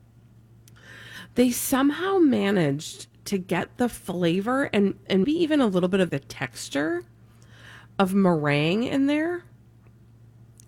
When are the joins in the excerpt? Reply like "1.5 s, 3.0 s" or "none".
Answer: 5.2 s, 6.1 s